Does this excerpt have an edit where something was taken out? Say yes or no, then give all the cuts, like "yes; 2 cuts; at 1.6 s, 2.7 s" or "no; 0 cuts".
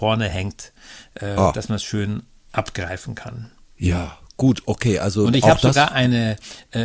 no; 0 cuts